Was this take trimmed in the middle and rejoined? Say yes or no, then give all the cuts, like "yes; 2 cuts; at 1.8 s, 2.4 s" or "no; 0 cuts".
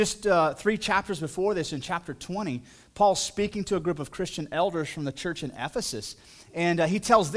no; 0 cuts